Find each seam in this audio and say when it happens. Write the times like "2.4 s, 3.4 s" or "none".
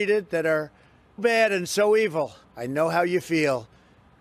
1.2 s, 2.4 s